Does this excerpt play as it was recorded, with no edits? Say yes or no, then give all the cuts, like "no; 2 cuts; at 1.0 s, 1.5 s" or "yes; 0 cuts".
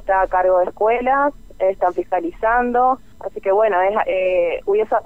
no; 1 cut; at 3.1 s